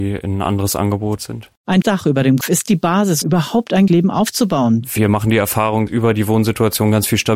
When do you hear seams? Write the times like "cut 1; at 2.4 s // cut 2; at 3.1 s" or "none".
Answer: cut 1; at 1.2 s // cut 2; at 1.8 s // cut 3; at 2.4 s // cut 4; at 3.2 s // cut 5; at 3.9 s // cut 6; at 5.9 s